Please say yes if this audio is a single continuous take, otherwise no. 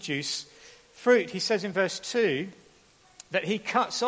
yes